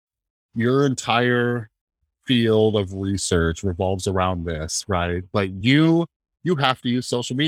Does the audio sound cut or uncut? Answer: uncut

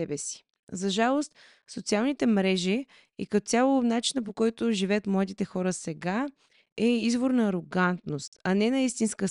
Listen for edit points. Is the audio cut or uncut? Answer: uncut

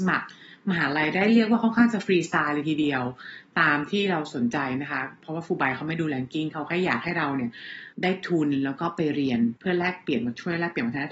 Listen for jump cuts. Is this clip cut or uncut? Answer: cut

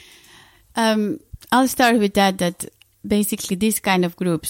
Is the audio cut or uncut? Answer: uncut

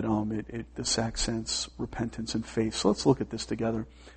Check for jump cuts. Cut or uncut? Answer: uncut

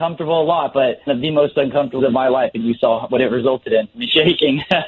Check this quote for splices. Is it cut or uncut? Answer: cut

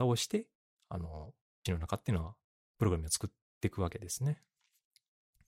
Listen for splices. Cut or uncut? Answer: cut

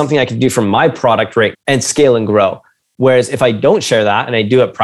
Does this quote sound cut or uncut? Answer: cut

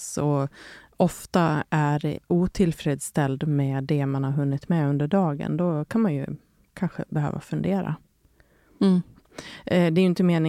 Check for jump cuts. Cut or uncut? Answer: uncut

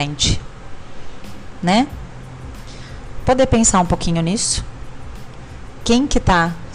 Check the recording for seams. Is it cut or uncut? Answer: uncut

